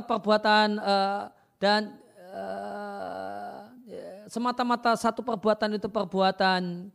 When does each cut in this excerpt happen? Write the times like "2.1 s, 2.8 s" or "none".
none